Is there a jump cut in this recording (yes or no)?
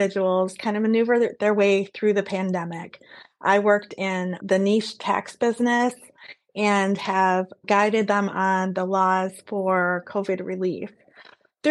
yes